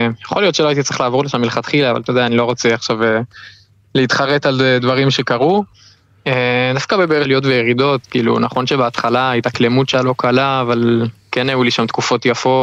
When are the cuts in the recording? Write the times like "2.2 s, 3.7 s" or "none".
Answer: 7.2 s, 9.9 s